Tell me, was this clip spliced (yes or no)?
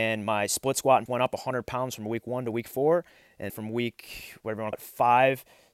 yes